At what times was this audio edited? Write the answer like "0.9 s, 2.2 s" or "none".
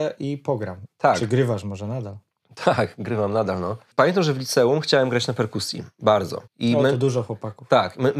2.3 s, 6.5 s